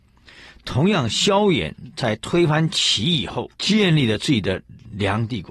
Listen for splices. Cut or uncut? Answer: cut